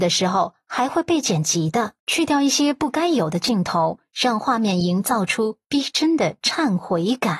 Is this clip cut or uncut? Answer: cut